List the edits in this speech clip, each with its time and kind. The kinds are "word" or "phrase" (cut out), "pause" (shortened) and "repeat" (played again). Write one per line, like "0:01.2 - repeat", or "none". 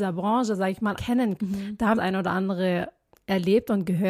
0:01.0 - word
0:01.4 - word
0:01.9 - phrase